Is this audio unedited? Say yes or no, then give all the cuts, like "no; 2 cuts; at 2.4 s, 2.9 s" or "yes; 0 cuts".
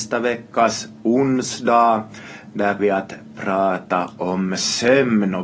no; 1 cut; at 2.8 s